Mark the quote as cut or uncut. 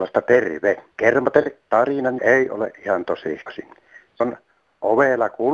cut